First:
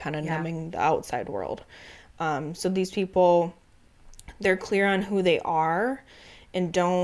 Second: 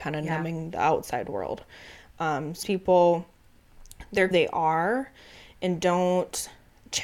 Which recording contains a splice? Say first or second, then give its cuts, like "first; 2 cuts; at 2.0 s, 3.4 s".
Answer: second; 2 cuts; at 2.6 s, 4.3 s